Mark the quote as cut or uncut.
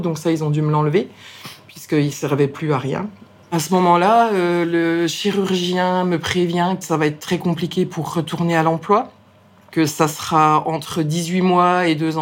cut